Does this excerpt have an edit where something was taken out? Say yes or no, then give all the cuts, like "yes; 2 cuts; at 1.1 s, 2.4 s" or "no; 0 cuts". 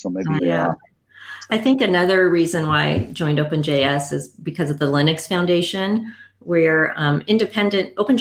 no; 0 cuts